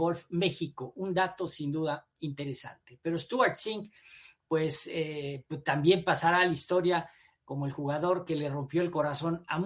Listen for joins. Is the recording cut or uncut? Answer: uncut